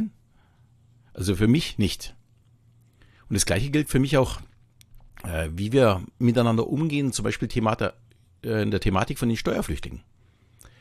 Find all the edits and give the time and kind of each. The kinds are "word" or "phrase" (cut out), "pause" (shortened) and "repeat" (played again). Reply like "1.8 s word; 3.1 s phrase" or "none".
none